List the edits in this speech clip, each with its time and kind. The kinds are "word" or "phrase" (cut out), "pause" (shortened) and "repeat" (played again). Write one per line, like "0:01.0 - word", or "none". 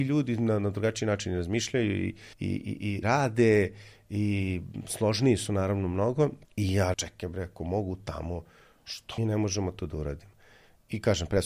0:02.3 - pause
0:03.0 - word
0:06.4 - pause
0:06.9 - word
0:09.2 - word
0:09.8 - word